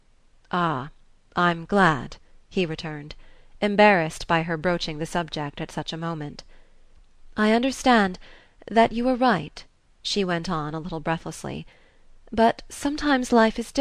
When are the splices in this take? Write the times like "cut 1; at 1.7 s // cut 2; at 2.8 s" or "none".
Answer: none